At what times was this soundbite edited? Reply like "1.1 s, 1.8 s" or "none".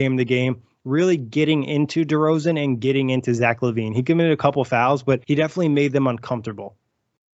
5.2 s